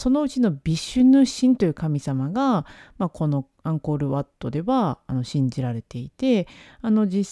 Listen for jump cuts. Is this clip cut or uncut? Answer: uncut